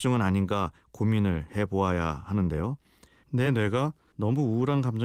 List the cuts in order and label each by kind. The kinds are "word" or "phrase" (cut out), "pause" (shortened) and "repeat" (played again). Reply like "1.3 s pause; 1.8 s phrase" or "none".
none

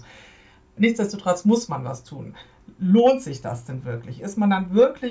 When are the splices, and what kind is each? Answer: none

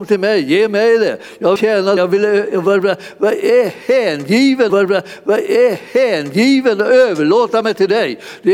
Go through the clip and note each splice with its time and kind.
1.6 s word; 2.0 s word; 4.7 s repeat

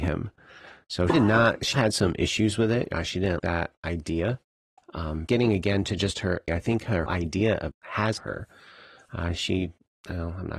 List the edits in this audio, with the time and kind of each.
1.1 s word; 1.7 s word; 3.4 s word; 5.3 s word; 6.5 s word; 7.1 s word; 7.7 s word; 8.2 s word

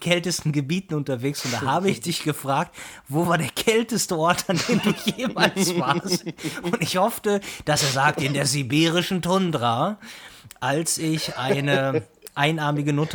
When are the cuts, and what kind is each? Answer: none

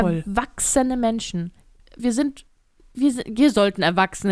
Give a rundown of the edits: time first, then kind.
2.0 s phrase

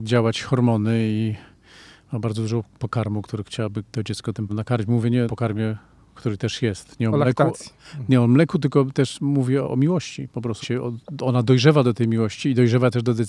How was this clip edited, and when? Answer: 3.9 s pause; 4.5 s word; 5.3 s phrase; 9.6 s word; 10.6 s word

